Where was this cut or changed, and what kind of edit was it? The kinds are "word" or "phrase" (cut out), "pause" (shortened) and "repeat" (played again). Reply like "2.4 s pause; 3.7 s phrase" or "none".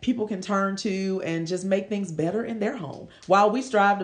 none

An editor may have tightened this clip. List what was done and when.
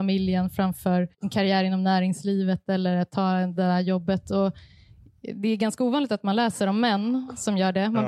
1.1 s pause

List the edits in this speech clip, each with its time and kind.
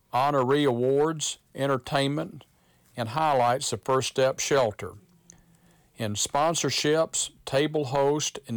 none

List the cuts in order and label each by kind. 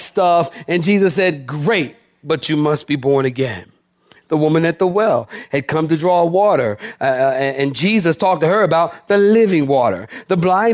none

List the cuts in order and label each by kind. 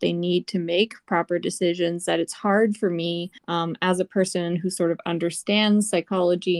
3.4 s pause

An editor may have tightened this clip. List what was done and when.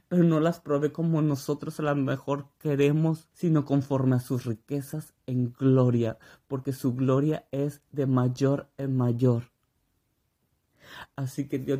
3.3 s pause

